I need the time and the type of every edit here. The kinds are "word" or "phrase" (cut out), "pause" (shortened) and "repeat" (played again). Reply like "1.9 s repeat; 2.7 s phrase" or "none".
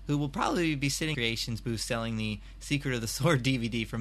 1.1 s phrase